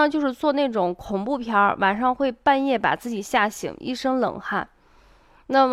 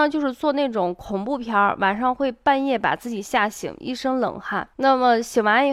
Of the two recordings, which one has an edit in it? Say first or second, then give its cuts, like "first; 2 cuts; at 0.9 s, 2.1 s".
second; 1 cut; at 4.7 s